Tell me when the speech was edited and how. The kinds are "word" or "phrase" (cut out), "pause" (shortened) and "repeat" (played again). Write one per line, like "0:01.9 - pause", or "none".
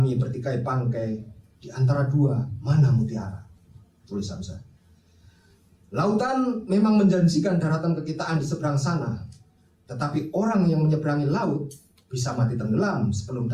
none